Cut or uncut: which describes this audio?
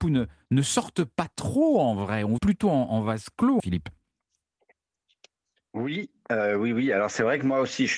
cut